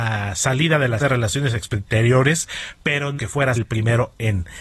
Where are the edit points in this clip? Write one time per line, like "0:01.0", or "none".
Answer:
0:01.0
0:03.2
0:03.6